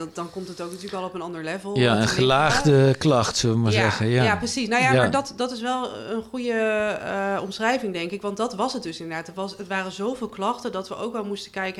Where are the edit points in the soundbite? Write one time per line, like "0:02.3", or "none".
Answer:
none